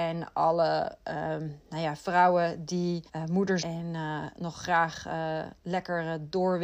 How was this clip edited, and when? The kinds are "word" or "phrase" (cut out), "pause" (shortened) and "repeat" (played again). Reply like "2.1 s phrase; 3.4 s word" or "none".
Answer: 3.1 s pause; 3.6 s word